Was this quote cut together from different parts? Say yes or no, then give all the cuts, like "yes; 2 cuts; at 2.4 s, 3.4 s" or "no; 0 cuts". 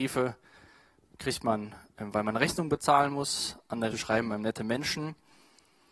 yes; 1 cut; at 3.9 s